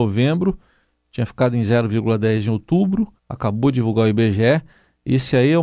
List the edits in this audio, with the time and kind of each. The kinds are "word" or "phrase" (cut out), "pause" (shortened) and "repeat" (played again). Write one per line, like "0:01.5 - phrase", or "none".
0:03.2 - pause